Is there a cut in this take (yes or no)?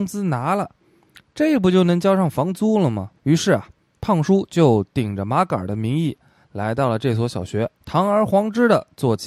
yes